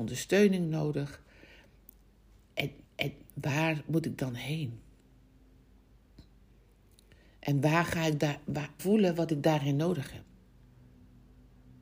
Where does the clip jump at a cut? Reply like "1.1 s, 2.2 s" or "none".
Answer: 2.8 s, 8.8 s